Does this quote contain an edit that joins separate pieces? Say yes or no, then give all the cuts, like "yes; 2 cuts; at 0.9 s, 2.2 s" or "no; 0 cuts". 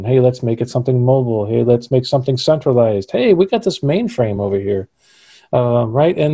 no; 0 cuts